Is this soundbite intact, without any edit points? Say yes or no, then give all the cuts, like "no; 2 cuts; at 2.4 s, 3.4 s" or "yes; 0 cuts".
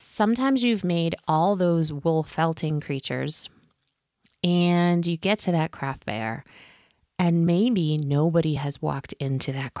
yes; 0 cuts